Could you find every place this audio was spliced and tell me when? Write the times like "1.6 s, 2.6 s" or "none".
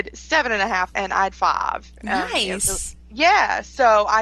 0.9 s, 1.3 s